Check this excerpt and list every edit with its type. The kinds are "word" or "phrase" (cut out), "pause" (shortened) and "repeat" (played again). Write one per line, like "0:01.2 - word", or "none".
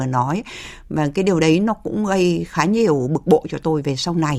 none